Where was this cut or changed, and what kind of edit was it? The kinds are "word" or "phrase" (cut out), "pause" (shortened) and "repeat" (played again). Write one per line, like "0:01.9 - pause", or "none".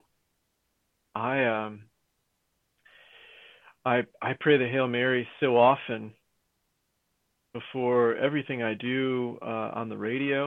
none